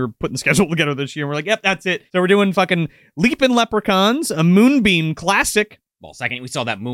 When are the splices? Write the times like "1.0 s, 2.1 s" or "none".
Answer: 2.1 s